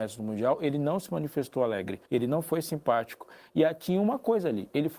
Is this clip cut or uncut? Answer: cut